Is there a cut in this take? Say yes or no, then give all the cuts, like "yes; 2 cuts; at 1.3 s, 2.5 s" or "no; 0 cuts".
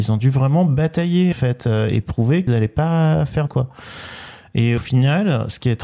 yes; 4 cuts; at 1.3 s, 2.5 s, 3.5 s, 4.8 s